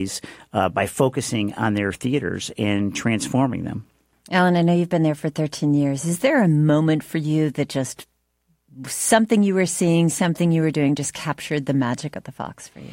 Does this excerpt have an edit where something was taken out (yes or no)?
no